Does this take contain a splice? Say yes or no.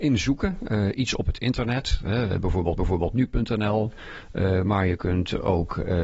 yes